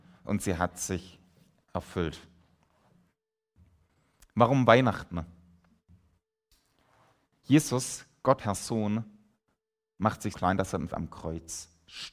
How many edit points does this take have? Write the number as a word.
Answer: three